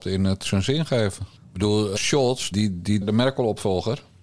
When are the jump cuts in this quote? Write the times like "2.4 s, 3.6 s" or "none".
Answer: 1.4 s, 2.0 s, 2.5 s, 3.0 s

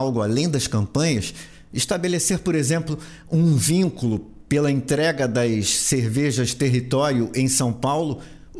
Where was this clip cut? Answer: none

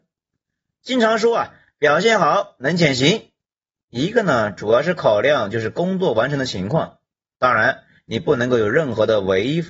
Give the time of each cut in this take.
none

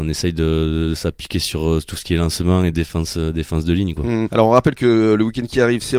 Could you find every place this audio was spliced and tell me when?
none

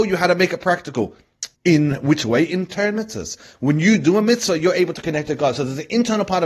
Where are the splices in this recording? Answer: 1.5 s

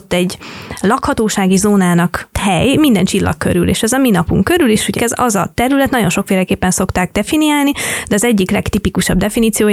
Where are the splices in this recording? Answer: 2.3 s, 5.0 s

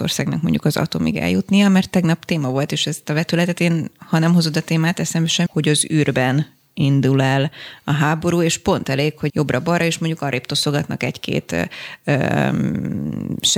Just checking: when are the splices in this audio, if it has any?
5.5 s, 9.3 s

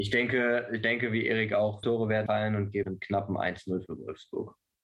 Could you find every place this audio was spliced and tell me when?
1.8 s, 2.3 s, 2.8 s

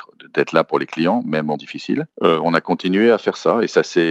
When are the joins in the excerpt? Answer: 1.6 s

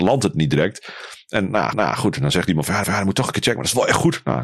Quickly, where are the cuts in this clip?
1.7 s, 2.8 s

